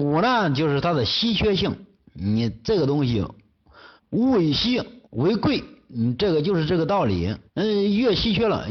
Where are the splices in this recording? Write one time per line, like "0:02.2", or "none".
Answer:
0:04.0
0:05.0
0:07.5